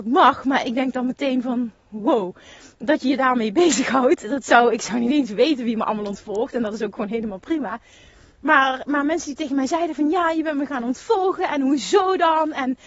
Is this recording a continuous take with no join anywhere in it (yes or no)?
yes